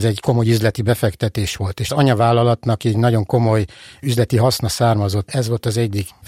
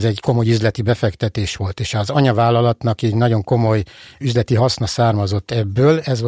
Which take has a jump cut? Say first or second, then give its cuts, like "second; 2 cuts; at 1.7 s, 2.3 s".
first; 2 cuts; at 1.9 s, 5.3 s